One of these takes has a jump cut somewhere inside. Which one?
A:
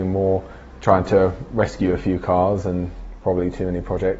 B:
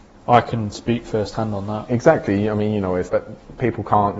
B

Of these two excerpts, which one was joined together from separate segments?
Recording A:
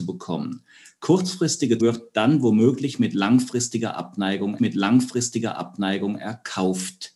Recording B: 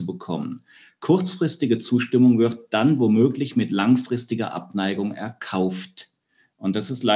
A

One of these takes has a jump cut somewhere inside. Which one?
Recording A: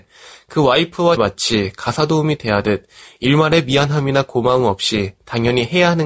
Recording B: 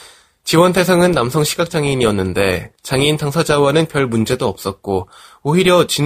A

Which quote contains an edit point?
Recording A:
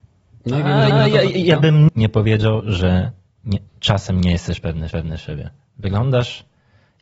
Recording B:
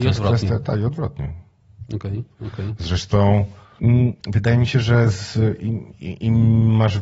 A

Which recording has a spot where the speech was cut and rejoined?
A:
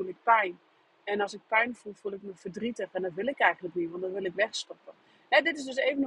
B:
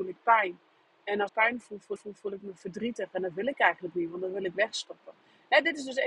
B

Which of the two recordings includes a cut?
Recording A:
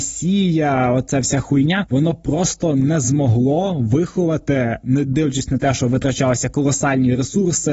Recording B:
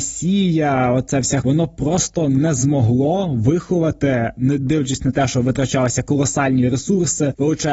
B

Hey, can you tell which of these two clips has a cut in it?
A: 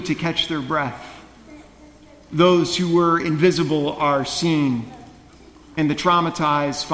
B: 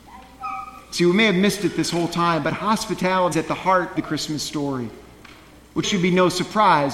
B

